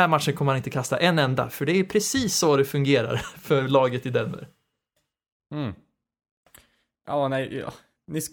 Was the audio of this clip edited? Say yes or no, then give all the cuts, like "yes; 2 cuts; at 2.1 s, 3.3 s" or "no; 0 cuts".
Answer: no; 0 cuts